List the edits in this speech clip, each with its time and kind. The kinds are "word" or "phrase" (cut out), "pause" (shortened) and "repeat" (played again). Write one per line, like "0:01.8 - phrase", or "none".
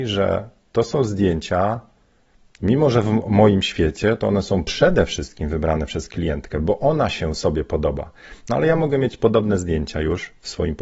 none